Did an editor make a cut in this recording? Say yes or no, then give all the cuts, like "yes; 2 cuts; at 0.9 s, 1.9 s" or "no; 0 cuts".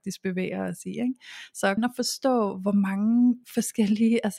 yes; 1 cut; at 1.8 s